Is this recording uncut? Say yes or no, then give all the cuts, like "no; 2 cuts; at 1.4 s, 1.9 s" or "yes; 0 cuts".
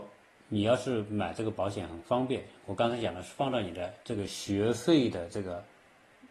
no; 1 cut; at 4.0 s